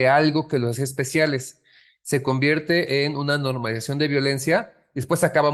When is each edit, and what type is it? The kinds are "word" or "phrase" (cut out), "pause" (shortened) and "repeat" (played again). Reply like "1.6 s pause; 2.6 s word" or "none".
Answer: none